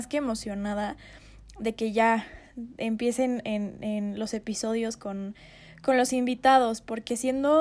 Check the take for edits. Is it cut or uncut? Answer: uncut